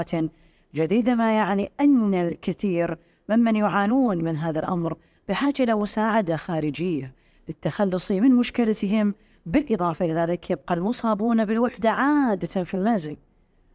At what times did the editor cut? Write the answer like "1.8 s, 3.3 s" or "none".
none